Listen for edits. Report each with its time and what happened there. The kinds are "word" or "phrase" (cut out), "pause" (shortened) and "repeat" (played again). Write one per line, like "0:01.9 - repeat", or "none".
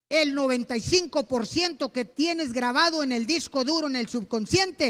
none